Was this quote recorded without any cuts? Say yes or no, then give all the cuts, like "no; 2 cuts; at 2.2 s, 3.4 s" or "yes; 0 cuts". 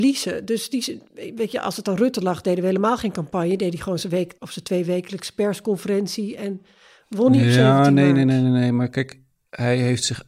no; 1 cut; at 4.4 s